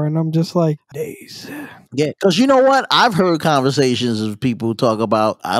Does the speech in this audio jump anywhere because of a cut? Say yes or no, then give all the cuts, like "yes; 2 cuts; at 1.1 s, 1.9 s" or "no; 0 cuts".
yes; 1 cut; at 0.9 s